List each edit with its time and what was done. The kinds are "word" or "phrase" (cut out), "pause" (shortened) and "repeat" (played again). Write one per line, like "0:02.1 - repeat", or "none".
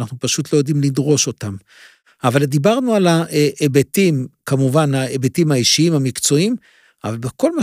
none